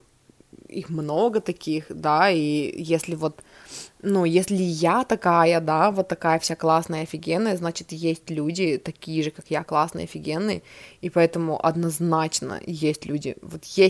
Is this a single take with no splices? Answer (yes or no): yes